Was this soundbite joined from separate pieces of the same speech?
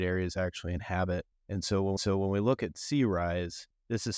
yes; 1 cut; at 2.0 s

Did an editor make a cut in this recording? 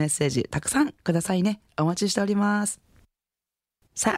no; 0 cuts

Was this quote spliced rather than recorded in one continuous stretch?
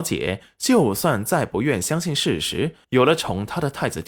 yes; 1 cut; at 2.8 s

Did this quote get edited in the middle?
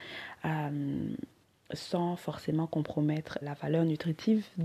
yes; 1 cut; at 3.4 s

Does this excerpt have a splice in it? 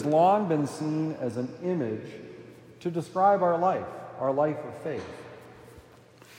no; 0 cuts

